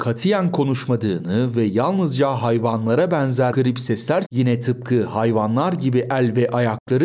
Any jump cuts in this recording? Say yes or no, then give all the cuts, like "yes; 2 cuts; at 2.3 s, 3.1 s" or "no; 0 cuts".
yes; 2 cuts; at 3.5 s, 4.2 s